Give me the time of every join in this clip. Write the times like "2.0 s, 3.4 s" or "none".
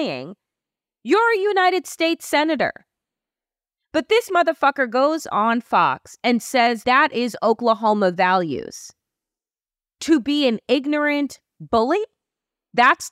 6.8 s